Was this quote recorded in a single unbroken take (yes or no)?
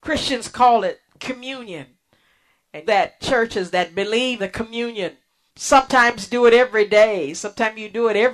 no